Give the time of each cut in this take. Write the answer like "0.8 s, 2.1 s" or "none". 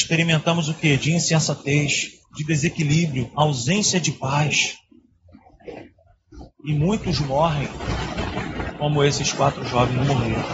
2.2 s